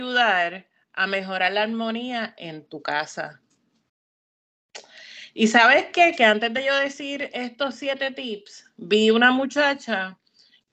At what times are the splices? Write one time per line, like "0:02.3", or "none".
none